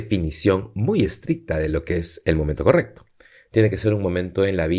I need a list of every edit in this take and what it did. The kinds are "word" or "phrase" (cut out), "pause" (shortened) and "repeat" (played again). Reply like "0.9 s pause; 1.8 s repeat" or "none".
none